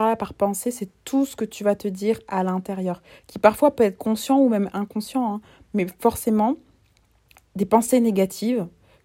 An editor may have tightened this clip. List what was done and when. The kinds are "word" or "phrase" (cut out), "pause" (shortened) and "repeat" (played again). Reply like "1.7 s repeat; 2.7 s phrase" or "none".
none